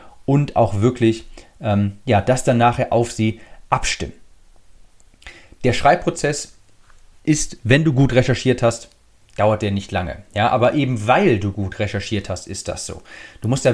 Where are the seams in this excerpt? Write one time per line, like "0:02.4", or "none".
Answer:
none